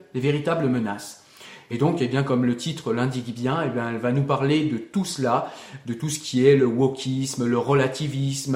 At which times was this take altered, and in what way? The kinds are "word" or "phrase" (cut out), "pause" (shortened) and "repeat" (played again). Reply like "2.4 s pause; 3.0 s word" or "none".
none